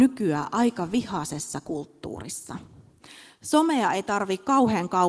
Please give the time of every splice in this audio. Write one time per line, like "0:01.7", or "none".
none